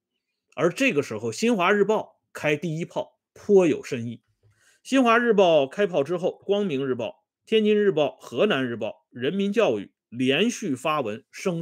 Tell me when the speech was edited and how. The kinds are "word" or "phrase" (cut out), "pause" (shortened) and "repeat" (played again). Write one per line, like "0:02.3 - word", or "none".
0:03.3 - pause
0:06.4 - phrase
0:07.4 - pause